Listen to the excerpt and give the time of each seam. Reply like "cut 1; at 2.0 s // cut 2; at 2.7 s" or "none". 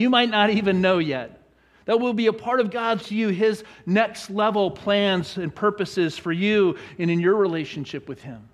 cut 1; at 3.0 s